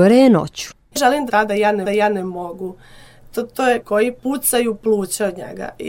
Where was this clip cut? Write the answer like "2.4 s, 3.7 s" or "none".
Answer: 1.0 s, 1.3 s, 1.8 s, 3.8 s, 4.2 s